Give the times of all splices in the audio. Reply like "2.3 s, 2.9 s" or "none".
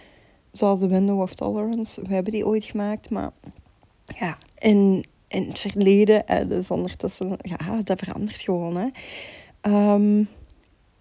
4.4 s